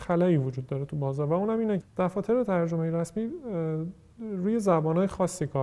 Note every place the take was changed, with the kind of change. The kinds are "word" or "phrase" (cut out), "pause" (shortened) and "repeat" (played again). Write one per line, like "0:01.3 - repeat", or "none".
0:01.8 - word